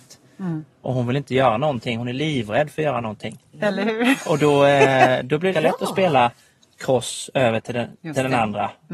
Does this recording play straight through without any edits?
no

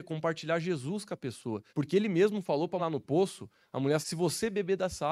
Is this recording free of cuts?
no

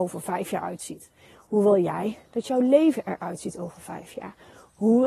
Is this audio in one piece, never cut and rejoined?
yes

